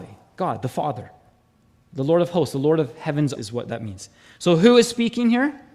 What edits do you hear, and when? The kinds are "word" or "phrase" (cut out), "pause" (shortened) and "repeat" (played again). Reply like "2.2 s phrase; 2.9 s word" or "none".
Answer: 3.3 s word